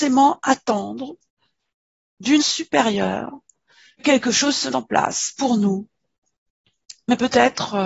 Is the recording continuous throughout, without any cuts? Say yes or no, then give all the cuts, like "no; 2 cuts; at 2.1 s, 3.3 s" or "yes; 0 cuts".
no; 3 cuts; at 2.4 s, 4.0 s, 4.7 s